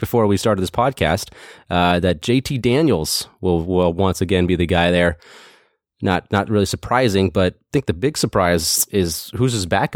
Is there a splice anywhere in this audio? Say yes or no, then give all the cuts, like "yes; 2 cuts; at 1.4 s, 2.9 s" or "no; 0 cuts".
no; 0 cuts